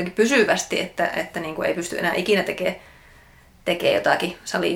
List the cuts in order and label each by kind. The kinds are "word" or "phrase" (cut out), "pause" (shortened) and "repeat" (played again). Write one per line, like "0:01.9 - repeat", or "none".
none